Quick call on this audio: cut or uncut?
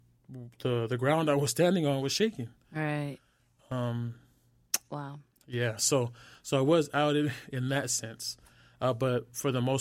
uncut